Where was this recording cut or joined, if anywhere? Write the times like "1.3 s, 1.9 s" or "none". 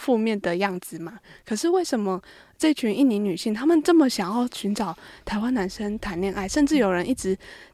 none